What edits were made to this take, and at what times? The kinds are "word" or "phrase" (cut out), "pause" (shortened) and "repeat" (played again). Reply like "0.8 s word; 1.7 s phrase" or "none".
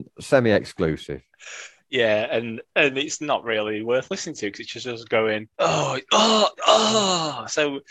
5.5 s pause